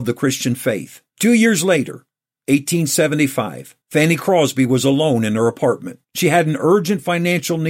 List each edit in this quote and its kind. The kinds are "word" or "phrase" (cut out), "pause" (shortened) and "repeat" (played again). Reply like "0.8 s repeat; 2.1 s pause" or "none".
1.1 s pause; 3.8 s pause; 6.0 s pause